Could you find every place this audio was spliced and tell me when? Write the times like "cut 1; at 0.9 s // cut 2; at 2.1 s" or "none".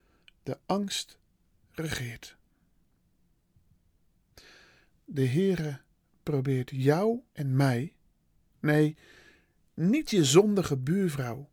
cut 1; at 7.3 s